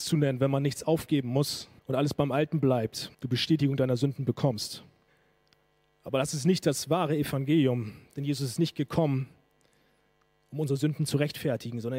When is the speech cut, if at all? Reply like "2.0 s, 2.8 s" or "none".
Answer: 1.8 s, 3.1 s, 5.1 s